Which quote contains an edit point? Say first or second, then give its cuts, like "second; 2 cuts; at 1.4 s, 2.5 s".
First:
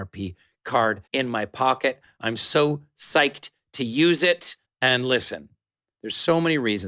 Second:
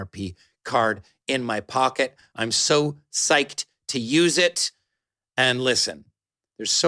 first; 2 cuts; at 1.1 s, 4.6 s